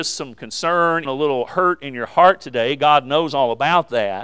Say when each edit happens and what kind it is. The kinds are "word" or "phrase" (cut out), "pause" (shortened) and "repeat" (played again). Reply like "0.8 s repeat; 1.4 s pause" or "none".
1.0 s word